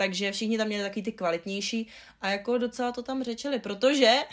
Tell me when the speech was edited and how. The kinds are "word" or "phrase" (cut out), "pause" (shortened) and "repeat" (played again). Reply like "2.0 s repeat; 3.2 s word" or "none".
none

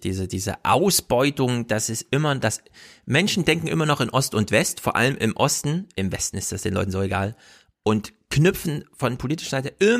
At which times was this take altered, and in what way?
none

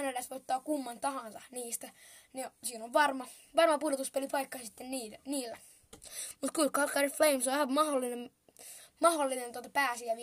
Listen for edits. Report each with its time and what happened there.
none

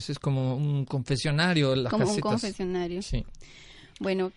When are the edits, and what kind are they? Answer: none

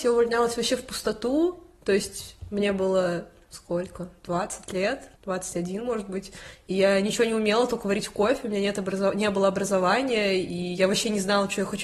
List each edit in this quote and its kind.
5.2 s pause

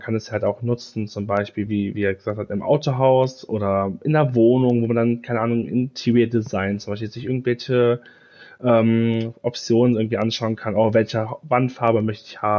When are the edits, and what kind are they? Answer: none

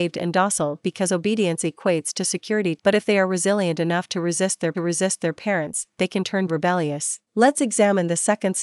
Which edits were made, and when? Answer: 2.8 s phrase; 4.7 s repeat; 6.5 s word; 7.2 s pause

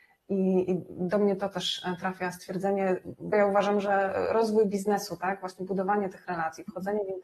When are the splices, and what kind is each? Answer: 3.3 s word

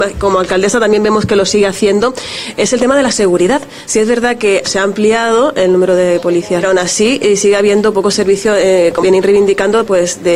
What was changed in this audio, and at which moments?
4.6 s word; 6.6 s phrase; 9.0 s word

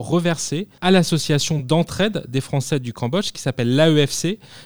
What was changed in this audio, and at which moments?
none

